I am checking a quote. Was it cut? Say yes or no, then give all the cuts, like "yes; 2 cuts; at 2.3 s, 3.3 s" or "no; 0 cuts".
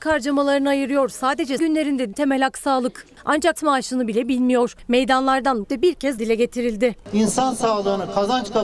yes; 5 cuts; at 1.6 s, 2.1 s, 3.6 s, 5.6 s, 6.2 s